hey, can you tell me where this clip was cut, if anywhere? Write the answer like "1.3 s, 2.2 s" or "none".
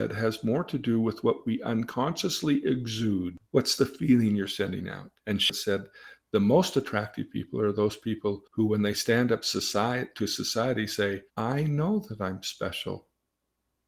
5.2 s, 8.5 s, 11.3 s